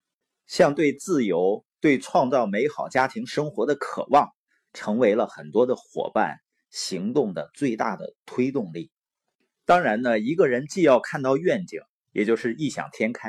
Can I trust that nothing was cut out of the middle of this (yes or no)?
yes